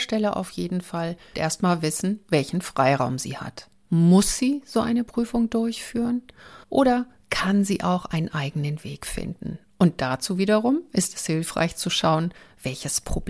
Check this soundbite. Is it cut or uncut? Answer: cut